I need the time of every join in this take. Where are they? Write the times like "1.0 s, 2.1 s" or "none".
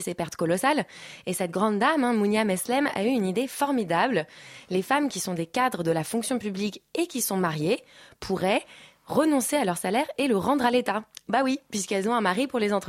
none

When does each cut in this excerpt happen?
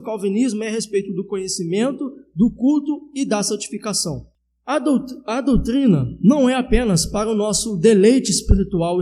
4.3 s

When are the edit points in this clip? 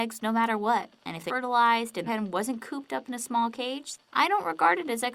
1.3 s, 2.1 s, 4.0 s

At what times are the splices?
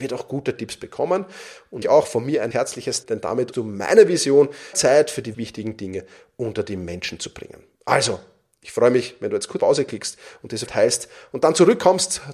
1.8 s, 2.5 s, 3.0 s, 3.5 s, 4.7 s, 5.3 s, 9.6 s, 10.7 s

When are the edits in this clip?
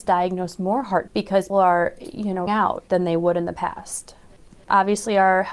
1.1 s, 1.5 s, 2.5 s, 2.9 s

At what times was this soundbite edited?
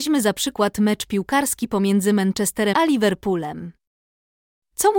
2.7 s

